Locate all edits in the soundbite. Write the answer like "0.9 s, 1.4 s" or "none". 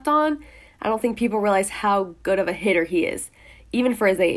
none